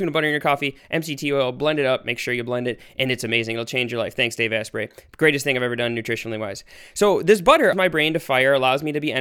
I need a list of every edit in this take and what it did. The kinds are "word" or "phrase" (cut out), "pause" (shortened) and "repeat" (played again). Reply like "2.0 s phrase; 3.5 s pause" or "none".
7.7 s word